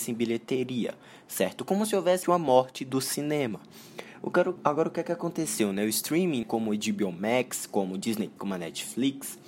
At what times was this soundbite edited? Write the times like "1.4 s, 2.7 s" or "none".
2.2 s, 4.6 s, 6.4 s, 8.4 s

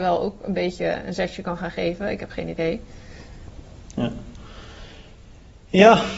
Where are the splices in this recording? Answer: none

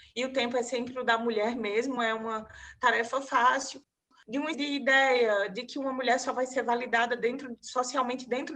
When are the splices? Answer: 2.0 s, 4.5 s

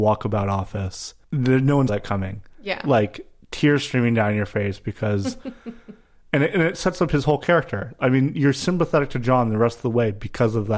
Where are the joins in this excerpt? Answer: 1.2 s, 1.9 s

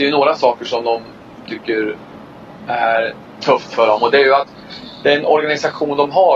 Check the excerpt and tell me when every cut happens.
1.4 s, 3.4 s

